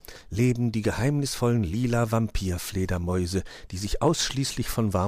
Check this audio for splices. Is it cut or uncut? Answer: uncut